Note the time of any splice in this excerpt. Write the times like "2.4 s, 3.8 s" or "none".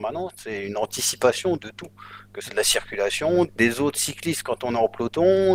1.6 s, 2.5 s, 3.5 s